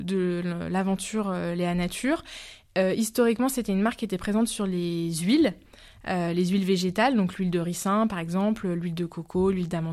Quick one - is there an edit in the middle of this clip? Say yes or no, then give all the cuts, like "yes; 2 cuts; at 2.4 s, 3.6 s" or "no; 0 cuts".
no; 0 cuts